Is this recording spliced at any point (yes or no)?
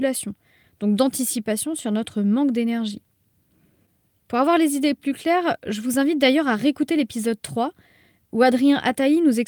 no